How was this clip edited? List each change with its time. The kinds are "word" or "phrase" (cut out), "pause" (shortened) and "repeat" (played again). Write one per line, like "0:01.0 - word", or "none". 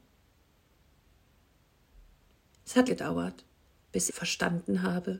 0:02.9 - word
0:04.1 - word